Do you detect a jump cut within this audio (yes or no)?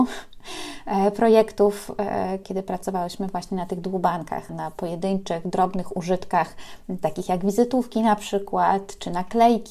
yes